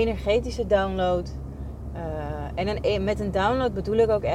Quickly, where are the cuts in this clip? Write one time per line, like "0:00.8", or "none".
none